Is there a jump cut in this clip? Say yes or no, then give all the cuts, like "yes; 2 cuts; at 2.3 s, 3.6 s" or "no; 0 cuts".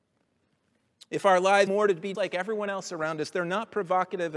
yes; 2 cuts; at 1.7 s, 2.1 s